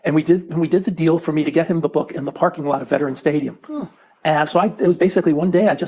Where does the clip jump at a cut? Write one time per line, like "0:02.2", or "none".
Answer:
none